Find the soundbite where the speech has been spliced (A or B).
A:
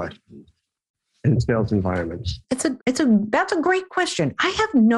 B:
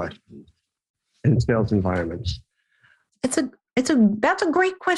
A